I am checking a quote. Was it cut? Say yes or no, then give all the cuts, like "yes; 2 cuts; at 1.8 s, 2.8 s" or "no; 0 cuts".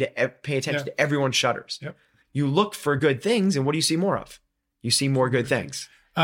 no; 0 cuts